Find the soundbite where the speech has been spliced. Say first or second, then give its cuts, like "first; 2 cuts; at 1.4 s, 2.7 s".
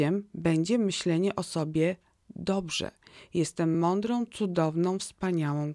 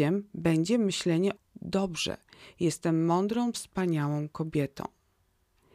second; 2 cuts; at 1.4 s, 3.5 s